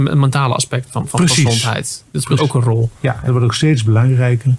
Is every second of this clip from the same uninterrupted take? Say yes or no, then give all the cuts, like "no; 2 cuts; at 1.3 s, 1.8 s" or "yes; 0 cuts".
no; 2 cuts; at 2.4 s, 3.3 s